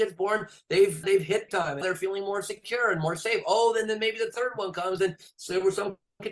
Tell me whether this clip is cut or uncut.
cut